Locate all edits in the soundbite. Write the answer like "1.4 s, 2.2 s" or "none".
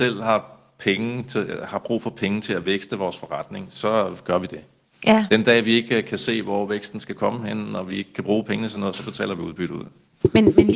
none